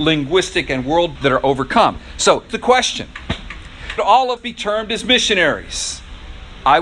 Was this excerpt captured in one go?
no; 4 cuts; at 1.2 s, 2.5 s, 4.0 s, 4.4 s

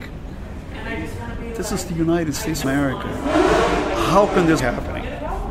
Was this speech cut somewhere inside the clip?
yes; 2 cuts; at 2.6 s, 4.6 s

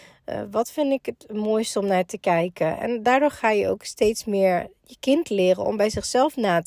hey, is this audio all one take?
yes; 0 cuts

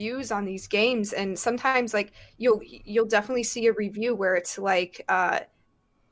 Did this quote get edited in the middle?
no; 0 cuts

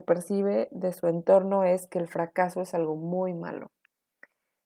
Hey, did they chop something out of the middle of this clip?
no; 0 cuts

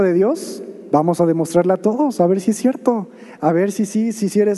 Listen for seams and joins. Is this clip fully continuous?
yes; 0 cuts

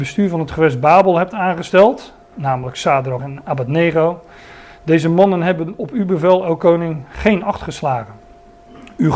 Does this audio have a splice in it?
yes; 1 cut; at 3.2 s

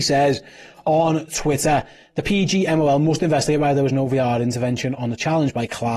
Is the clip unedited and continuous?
yes; 0 cuts

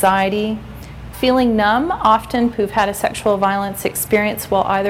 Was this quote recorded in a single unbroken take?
no; 2 cuts; at 1.1 s, 2.5 s

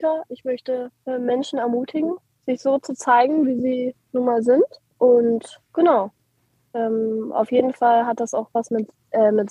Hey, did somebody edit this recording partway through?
no; 0 cuts

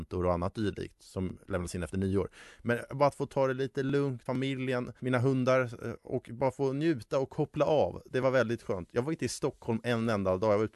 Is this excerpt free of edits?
no; 1 cut; at 4.3 s

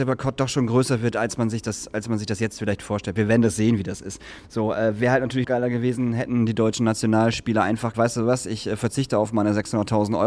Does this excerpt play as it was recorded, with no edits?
no; 2 cuts; at 5.4 s, 7.9 s

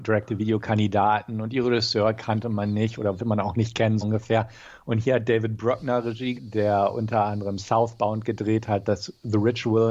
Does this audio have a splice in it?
yes; 3 cuts; at 3.2 s, 4.0 s, 6.3 s

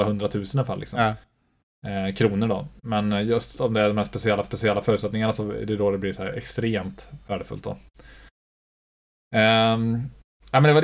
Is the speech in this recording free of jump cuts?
no; 2 cuts; at 3.5 s, 4.4 s

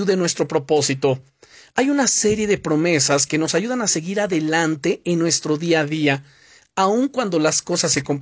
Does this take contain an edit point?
no; 0 cuts

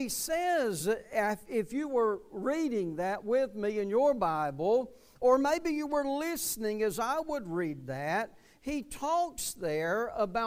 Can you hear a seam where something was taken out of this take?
no; 0 cuts

